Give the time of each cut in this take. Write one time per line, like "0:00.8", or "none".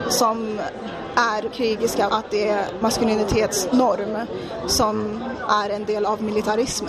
0:01.5
0:02.1
0:02.8